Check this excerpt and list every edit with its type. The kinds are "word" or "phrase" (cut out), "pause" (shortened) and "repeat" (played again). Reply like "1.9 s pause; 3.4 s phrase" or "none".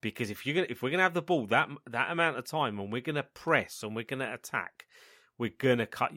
none